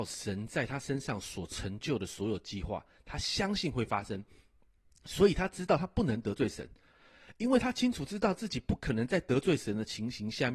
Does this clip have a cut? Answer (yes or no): no